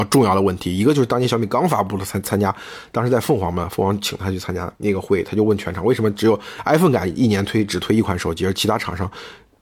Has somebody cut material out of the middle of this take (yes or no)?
yes